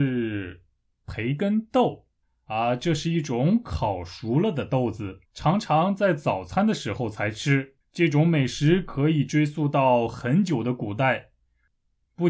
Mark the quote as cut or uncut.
cut